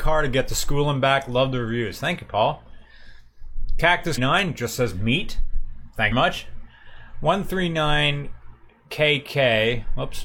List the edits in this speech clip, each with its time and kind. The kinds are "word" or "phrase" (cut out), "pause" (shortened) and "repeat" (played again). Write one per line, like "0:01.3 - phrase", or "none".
0:04.2 - phrase
0:06.1 - phrase